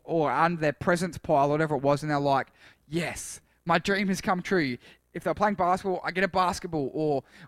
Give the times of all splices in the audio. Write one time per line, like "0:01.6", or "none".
none